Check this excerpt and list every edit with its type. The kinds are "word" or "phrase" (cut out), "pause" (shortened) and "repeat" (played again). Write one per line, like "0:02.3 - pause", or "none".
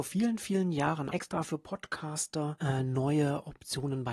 0:01.1 - word